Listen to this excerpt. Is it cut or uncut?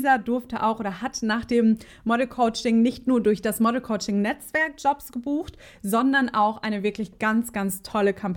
uncut